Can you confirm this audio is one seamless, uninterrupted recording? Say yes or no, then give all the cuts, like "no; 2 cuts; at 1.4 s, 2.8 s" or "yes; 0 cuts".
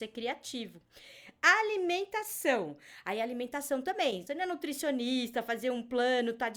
no; 1 cut; at 4.3 s